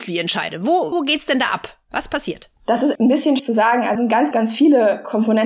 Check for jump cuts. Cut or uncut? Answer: cut